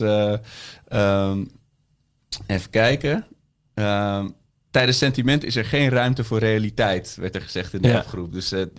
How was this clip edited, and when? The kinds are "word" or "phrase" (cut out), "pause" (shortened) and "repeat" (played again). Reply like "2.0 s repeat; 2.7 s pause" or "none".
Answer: none